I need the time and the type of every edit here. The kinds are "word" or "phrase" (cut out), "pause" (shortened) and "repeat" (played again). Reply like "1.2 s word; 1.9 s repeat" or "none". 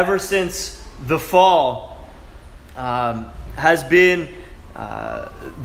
none